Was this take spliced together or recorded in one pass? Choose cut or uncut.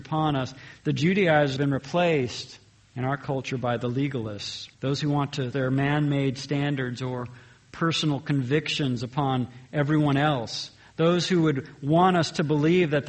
cut